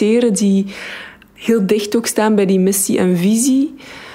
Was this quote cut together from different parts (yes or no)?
no